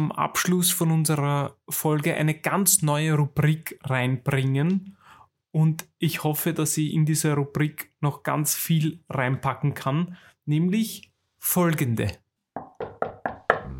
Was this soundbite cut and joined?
no; 0 cuts

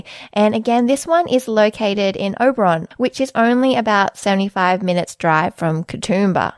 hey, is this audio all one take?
yes; 0 cuts

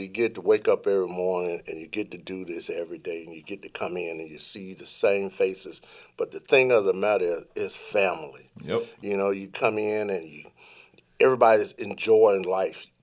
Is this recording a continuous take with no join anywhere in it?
yes; 0 cuts

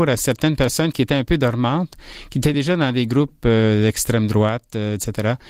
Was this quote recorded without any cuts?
yes; 0 cuts

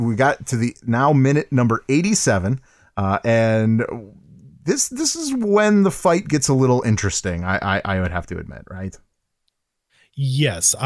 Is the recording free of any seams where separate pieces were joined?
yes; 0 cuts

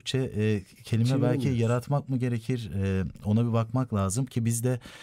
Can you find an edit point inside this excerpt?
no; 0 cuts

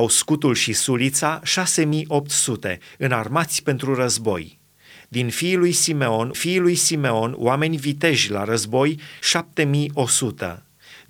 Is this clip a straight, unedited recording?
no; 1 cut; at 6.3 s

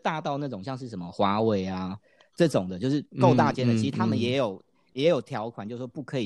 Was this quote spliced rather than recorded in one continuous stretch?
no; 0 cuts

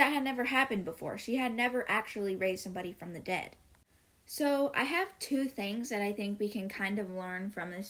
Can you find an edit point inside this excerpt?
no; 0 cuts

